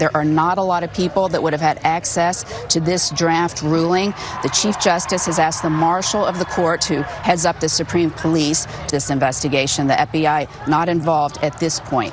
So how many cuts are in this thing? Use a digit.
2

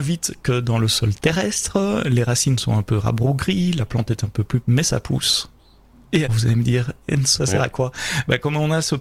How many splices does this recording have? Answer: 3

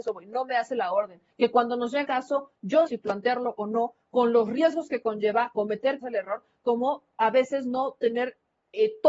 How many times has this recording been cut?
4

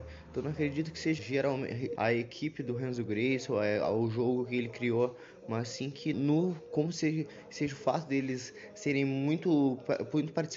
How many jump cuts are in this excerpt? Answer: 3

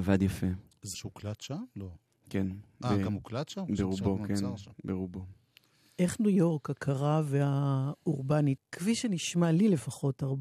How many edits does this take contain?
2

